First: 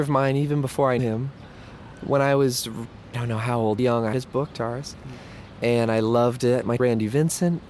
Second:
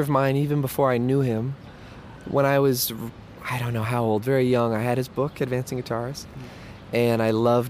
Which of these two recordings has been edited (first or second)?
first